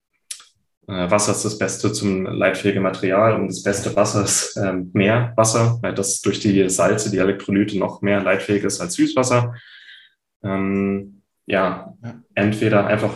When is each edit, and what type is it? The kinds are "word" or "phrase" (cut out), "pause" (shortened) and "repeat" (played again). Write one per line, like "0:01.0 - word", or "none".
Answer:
0:02.2 - word